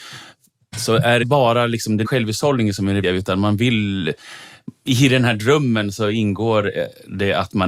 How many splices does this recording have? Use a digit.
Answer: 3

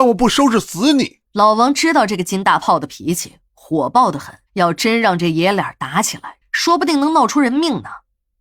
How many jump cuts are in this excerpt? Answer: 2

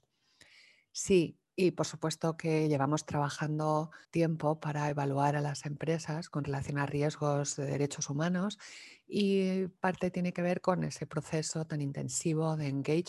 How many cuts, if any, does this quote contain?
1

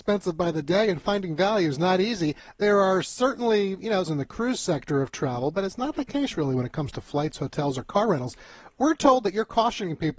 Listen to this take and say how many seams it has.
1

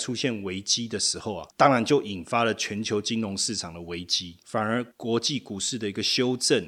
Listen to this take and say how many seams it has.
1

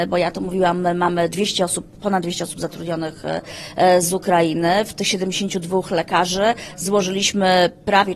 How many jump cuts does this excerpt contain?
0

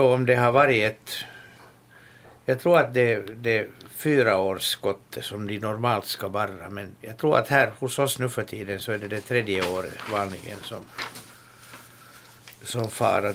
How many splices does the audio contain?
0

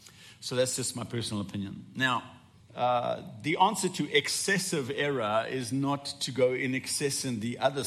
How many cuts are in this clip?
1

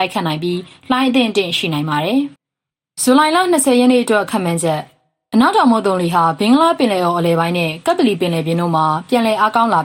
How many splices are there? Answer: 1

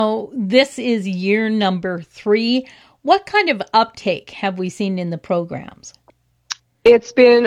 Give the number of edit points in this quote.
0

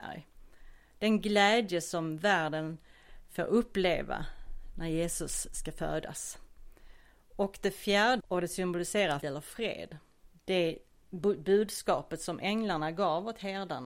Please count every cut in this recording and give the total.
2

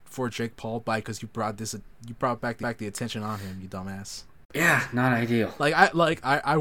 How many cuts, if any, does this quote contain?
2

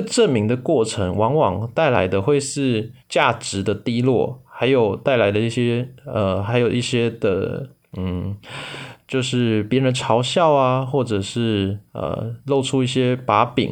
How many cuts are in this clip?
1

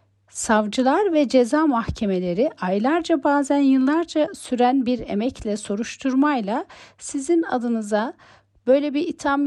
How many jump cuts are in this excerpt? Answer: 0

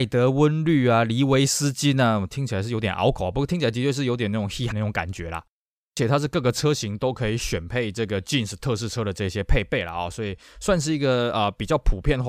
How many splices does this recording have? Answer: 1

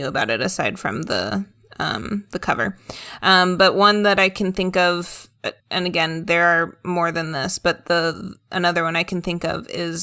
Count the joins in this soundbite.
1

